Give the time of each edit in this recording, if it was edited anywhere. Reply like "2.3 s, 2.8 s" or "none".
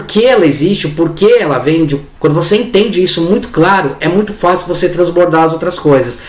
none

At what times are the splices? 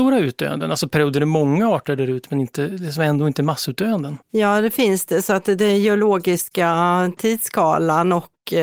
4.2 s

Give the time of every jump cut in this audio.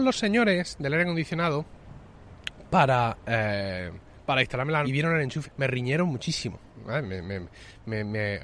4.8 s, 5.4 s

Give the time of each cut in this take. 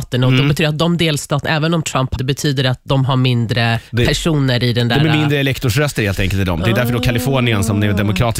2.1 s, 3.9 s

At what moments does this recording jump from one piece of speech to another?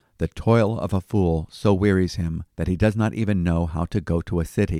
2.5 s

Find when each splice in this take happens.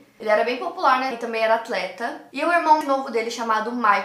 1.1 s, 2.8 s

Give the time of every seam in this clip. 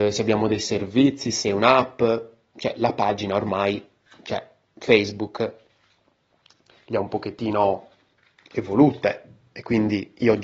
none

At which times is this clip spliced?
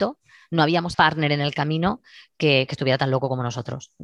0.9 s

